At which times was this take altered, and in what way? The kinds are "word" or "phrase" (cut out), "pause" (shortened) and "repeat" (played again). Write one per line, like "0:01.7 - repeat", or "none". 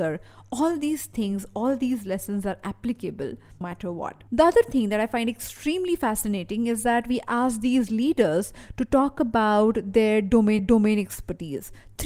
0:03.6 - word
0:04.3 - pause
0:10.6 - repeat